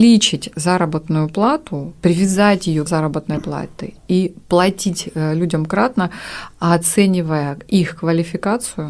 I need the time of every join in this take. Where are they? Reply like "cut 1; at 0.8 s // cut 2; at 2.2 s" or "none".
cut 1; at 2.9 s